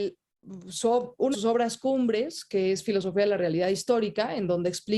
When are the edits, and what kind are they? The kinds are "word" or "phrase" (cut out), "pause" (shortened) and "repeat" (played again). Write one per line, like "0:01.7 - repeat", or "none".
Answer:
0:01.3 - word